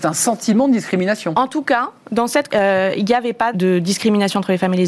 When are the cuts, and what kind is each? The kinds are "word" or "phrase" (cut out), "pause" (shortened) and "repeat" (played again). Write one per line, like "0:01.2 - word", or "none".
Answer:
0:02.5 - word
0:03.5 - word